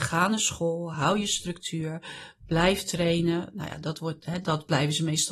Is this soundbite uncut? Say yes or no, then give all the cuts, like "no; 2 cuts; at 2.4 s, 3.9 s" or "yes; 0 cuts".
yes; 0 cuts